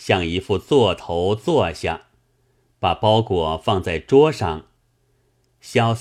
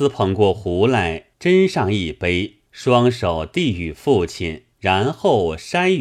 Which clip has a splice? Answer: second; 3 cuts; at 1.3 s, 2.7 s, 4.7 s

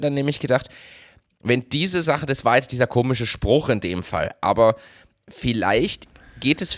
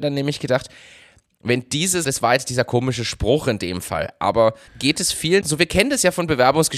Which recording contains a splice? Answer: second; 3 cuts; at 2.0 s, 4.7 s, 5.4 s

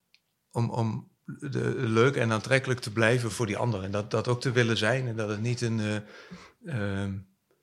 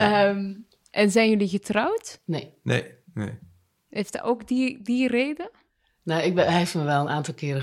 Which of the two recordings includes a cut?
first; 1 cut; at 1.2 s

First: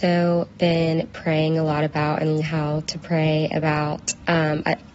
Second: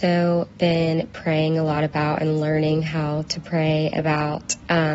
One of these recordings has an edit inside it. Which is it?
first; 1 cut; at 2.4 s

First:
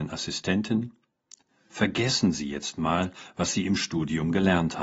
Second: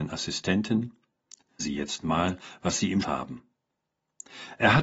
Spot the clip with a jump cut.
second; 2 cuts; at 1.6 s, 3.0 s

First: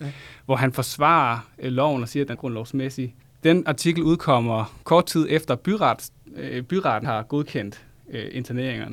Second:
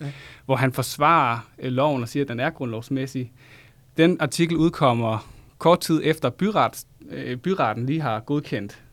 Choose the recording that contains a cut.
first; 4 cuts; at 2.3 s, 3.2 s, 4.8 s, 7.0 s

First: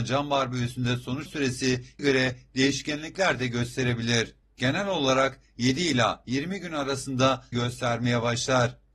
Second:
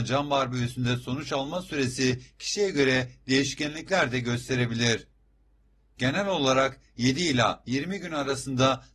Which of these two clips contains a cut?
first; 4 cuts; at 1.3 s, 2.0 s, 4.4 s, 7.5 s

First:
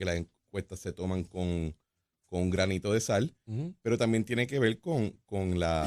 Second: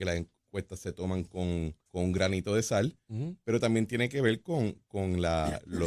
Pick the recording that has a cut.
second; 1 cut; at 1.8 s

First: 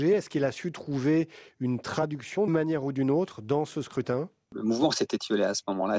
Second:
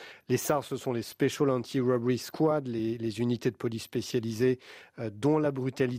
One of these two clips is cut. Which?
first; 1 cut; at 2.5 s

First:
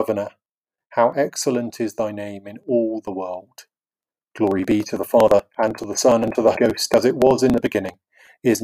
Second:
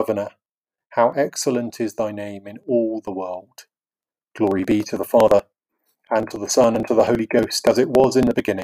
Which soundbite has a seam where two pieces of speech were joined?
first; 2 cuts; at 5.5 s, 6.5 s

